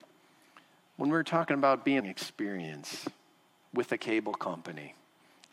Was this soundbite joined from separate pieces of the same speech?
yes; 1 cut; at 2.0 s

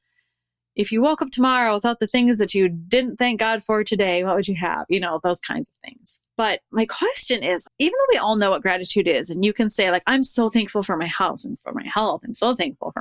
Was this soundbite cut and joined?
yes; 3 cuts; at 6.3 s, 7.7 s, 11.6 s

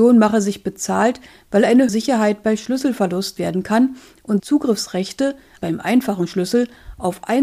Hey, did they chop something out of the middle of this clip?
yes; 4 cuts; at 1.9 s, 3.4 s, 4.4 s, 5.6 s

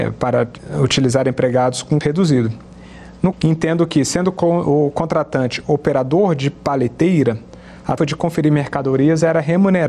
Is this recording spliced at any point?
yes; 3 cuts; at 2.0 s, 3.3 s, 8.0 s

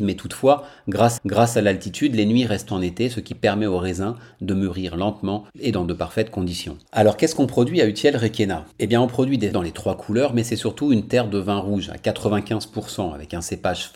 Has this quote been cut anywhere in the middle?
yes; 6 cuts; at 1.2 s, 2.7 s, 5.5 s, 6.9 s, 8.7 s, 9.5 s

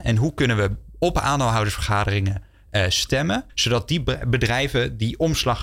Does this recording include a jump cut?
yes; 1 cut; at 3.5 s

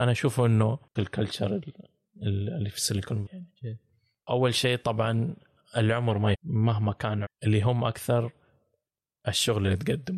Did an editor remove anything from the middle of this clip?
yes; 4 cuts; at 1.0 s, 3.3 s, 6.3 s, 7.2 s

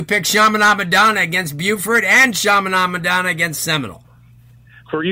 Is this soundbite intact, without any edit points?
yes; 0 cuts

